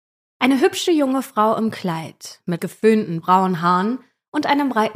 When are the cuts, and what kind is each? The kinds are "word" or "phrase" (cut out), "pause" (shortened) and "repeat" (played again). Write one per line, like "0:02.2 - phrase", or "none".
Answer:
0:02.6 - word